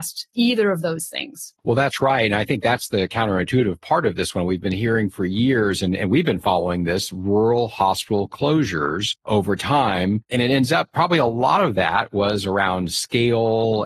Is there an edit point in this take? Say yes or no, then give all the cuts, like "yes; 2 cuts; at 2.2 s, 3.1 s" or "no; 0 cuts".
yes; 1 cut; at 1.6 s